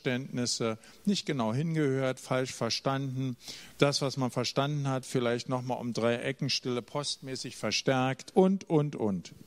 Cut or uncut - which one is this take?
uncut